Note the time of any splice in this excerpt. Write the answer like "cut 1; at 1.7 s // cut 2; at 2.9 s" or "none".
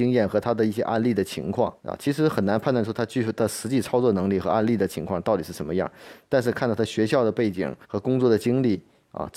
cut 1; at 1.8 s // cut 2; at 7.8 s